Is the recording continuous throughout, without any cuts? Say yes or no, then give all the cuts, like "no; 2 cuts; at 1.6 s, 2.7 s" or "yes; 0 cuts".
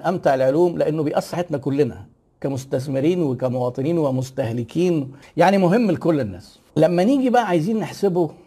no; 2 cuts; at 1.3 s, 6.7 s